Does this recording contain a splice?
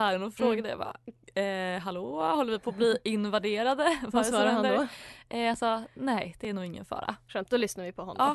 no; 0 cuts

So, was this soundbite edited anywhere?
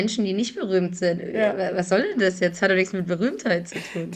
no; 0 cuts

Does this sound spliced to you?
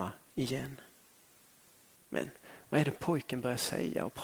no; 0 cuts

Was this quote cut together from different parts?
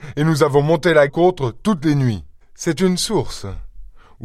yes; 2 cuts; at 1.1 s, 2.4 s

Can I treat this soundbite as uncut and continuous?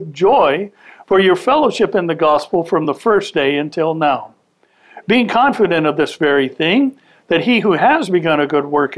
yes; 0 cuts

